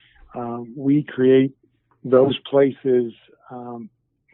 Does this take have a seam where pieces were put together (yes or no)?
yes